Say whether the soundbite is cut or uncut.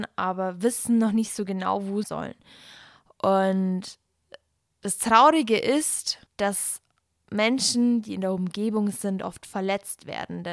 cut